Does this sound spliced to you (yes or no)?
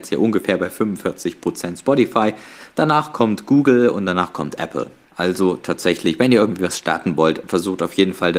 no